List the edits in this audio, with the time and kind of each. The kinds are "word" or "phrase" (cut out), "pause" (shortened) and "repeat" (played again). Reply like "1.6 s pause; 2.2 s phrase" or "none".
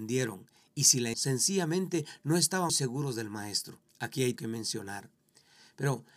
1.1 s word; 2.7 s word; 3.9 s pause; 4.4 s word